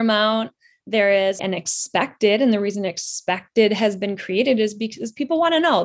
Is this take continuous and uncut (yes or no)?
no